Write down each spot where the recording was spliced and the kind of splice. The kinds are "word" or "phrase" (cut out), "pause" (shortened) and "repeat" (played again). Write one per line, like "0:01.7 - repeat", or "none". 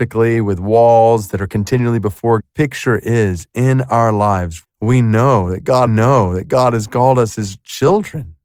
0:02.4 - phrase
0:04.6 - word
0:05.9 - repeat